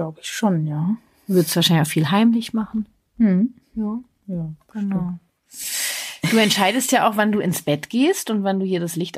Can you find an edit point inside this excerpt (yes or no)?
no